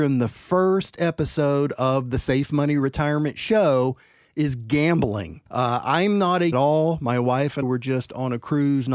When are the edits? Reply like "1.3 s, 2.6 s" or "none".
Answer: 5.5 s, 6.5 s, 7.6 s